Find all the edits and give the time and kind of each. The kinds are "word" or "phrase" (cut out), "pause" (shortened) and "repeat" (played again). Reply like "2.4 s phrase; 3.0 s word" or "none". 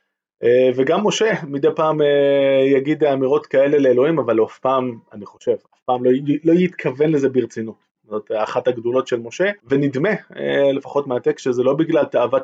9.6 s pause